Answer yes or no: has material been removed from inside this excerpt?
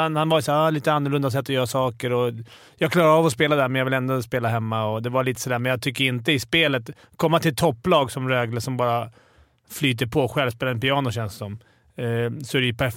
no